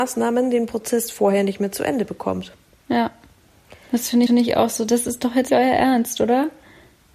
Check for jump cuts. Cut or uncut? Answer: cut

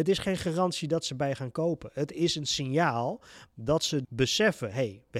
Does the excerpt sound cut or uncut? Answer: cut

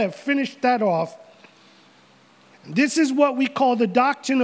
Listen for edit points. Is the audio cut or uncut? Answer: uncut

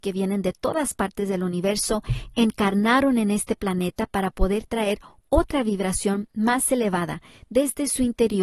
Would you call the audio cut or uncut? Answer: uncut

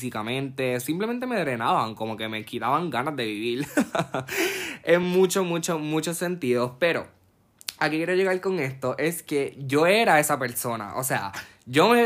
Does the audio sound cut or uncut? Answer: uncut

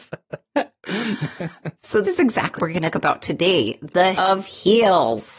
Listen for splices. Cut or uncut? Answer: cut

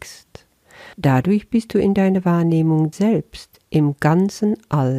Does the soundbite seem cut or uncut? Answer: cut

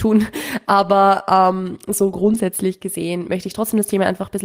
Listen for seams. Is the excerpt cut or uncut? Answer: uncut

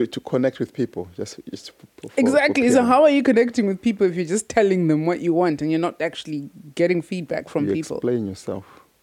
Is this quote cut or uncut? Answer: uncut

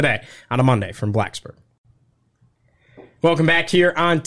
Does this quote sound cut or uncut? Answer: uncut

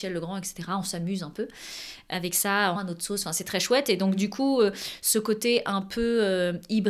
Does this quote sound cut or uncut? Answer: cut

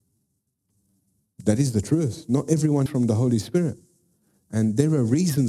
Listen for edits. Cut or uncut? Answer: cut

